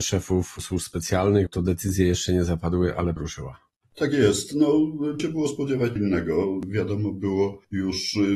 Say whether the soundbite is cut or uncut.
cut